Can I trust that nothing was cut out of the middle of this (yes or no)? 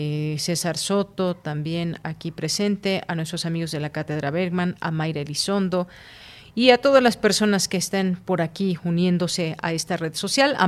yes